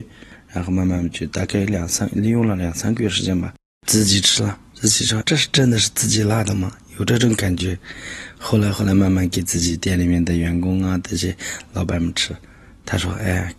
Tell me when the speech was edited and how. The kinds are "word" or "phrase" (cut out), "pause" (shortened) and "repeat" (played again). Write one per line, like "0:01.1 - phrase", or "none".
0:05.2 - word

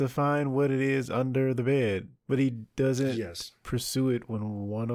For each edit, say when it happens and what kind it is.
0:02.2 - pause

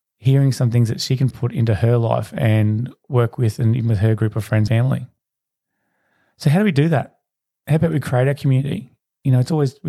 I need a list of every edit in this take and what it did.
0:01.3 - word
0:04.7 - word

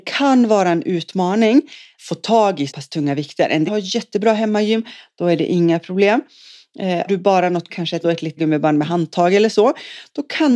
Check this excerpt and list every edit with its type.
0:02.0 - word
0:02.7 - word
0:03.7 - word
0:07.1 - word
0:07.7 - word
0:08.0 - word
0:08.4 - word

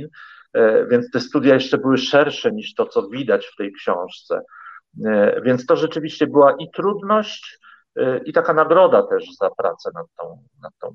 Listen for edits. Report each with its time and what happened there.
none

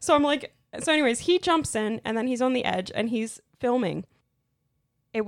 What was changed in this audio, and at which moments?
none

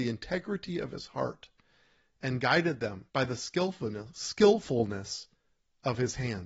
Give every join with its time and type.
0:03.1 - pause

